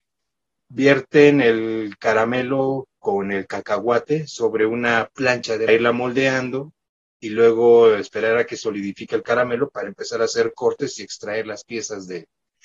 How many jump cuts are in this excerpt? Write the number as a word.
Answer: one